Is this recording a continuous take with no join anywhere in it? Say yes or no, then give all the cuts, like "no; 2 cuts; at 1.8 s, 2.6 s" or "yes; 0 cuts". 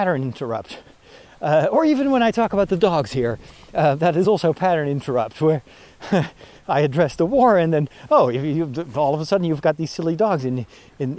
yes; 0 cuts